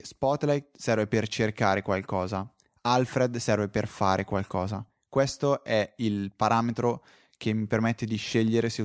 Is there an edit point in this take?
no; 0 cuts

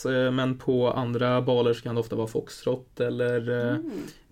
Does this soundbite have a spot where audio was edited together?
no; 0 cuts

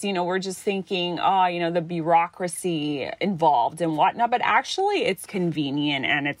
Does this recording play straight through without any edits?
no; 1 cut; at 5.3 s

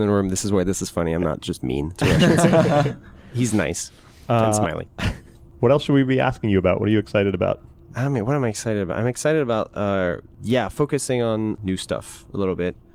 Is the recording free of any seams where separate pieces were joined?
yes; 0 cuts

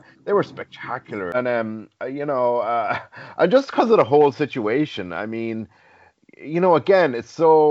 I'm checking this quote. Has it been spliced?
no; 0 cuts

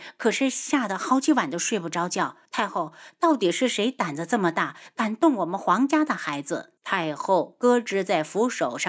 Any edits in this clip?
yes; 2 cuts; at 2.4 s, 6.8 s

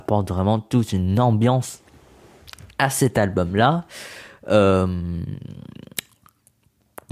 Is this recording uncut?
yes; 0 cuts

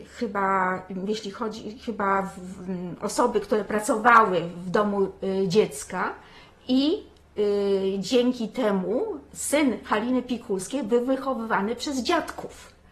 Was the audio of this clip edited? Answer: no; 0 cuts

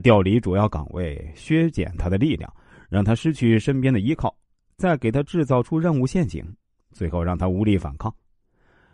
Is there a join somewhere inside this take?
no; 0 cuts

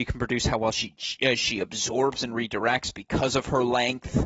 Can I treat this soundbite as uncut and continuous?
yes; 0 cuts

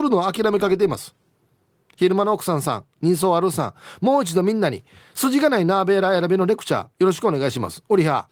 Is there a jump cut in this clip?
no; 0 cuts

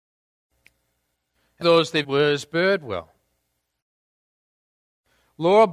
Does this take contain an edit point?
yes; 2 cuts; at 1.6 s, 2.0 s

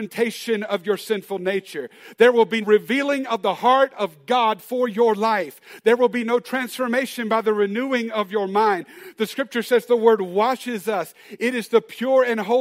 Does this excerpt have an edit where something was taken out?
yes; 1 cut; at 2.6 s

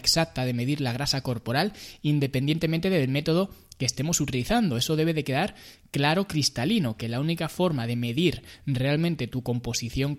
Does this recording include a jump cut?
no; 0 cuts

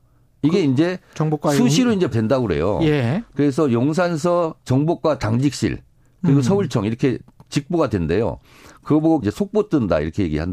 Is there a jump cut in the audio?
yes; 3 cuts; at 2.1 s, 4.6 s, 9.2 s

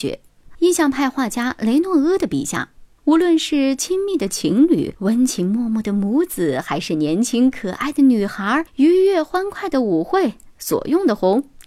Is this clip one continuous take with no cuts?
yes; 0 cuts

